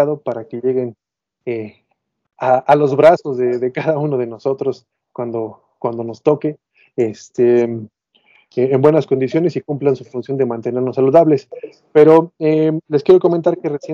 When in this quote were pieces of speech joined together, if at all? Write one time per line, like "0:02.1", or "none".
none